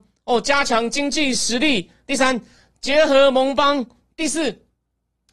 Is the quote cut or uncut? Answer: uncut